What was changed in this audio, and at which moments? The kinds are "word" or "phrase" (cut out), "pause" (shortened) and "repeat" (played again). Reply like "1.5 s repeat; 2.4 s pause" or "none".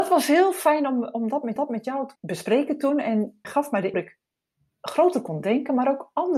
1.6 s repeat; 2.2 s word; 3.4 s word; 3.9 s phrase